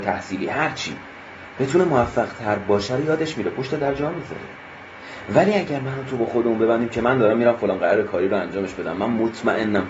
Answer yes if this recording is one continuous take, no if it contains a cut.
yes